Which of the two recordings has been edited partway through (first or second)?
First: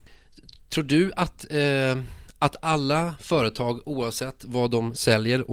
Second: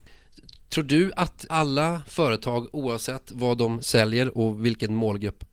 second